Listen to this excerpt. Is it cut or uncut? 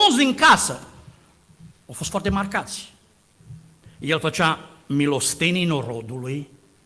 uncut